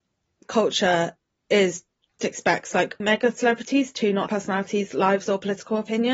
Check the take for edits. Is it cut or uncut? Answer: cut